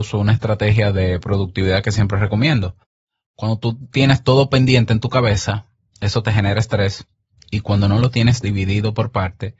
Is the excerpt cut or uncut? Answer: uncut